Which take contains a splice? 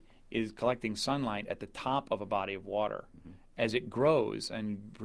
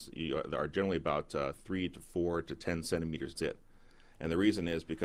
second; 1 cut; at 3.4 s

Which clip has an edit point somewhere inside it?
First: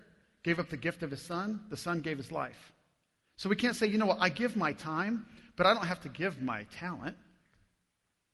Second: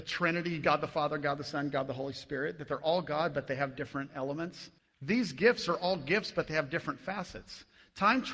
second; 1 cut; at 4.8 s

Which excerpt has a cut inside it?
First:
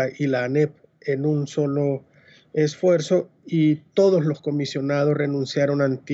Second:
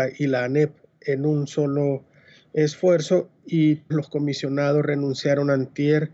second; 1 cut; at 3.9 s

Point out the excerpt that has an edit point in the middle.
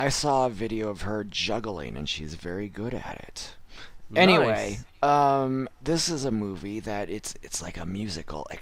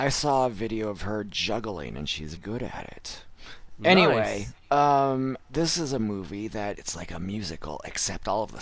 second; 2 cuts; at 2.4 s, 6.7 s

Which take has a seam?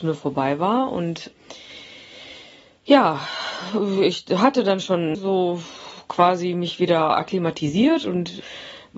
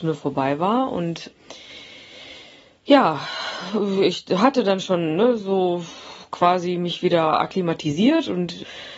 first; 1 cut; at 5.1 s

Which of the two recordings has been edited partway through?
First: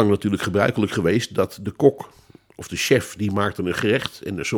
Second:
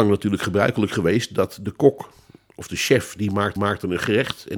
second; 1 cut; at 3.6 s

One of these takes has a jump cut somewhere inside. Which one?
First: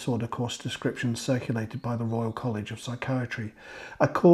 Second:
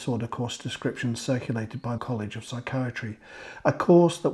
second; 1 cut; at 2.0 s

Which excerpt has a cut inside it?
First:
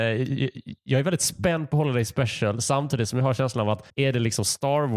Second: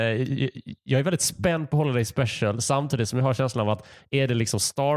first; 1 cut; at 3.9 s

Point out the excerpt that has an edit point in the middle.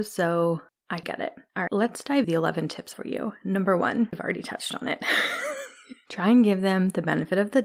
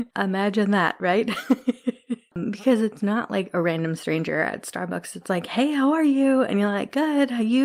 first; 5 cuts; at 1.0 s, 1.7 s, 2.2 s, 2.9 s, 4.1 s

